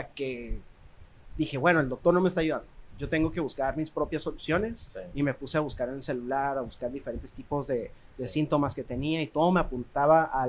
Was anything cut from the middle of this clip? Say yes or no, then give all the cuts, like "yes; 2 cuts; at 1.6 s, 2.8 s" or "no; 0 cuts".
no; 0 cuts